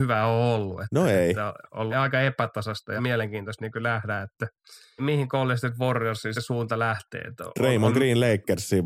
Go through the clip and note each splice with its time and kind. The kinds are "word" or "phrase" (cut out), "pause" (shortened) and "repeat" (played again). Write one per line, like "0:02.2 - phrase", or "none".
0:01.9 - word
0:03.0 - phrase
0:05.0 - word
0:06.3 - word